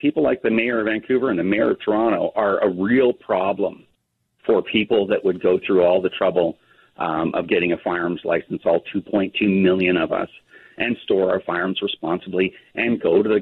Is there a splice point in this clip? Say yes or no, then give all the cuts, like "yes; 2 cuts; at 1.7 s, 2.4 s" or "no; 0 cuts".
no; 0 cuts